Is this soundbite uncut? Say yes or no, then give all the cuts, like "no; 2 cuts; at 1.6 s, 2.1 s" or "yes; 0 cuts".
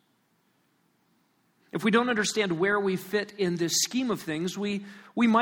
yes; 0 cuts